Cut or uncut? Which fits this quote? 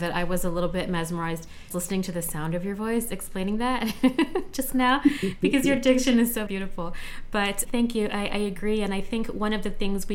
cut